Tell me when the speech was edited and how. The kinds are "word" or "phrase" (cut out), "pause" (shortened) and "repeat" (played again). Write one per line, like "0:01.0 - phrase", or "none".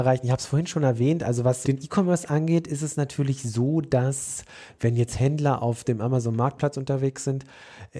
0:01.6 - word